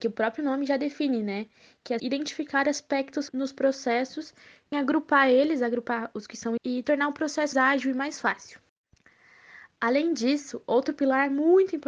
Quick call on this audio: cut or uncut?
cut